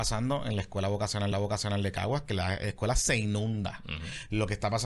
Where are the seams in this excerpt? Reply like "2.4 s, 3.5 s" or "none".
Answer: 1.3 s